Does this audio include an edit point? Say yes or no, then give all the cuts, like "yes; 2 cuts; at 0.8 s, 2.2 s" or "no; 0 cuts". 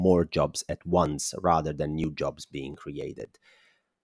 no; 0 cuts